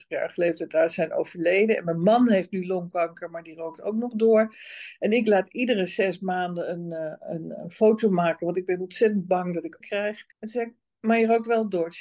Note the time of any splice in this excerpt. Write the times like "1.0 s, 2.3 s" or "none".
9.8 s, 10.3 s

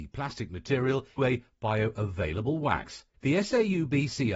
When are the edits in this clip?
1.2 s, 3.1 s

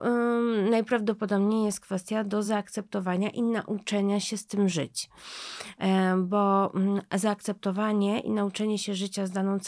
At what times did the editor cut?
none

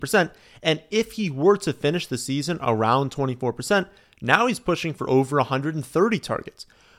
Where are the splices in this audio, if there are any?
none

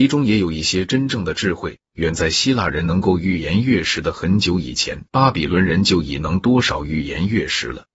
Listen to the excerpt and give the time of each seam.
5.1 s

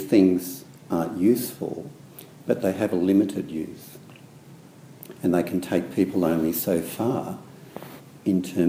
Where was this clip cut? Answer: none

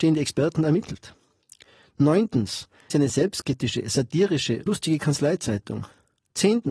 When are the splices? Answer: 2.9 s, 4.7 s

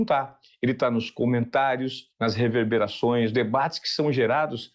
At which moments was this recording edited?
3.3 s

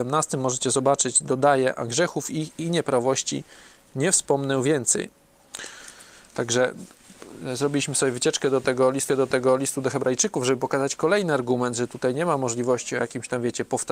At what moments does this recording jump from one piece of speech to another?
9.1 s

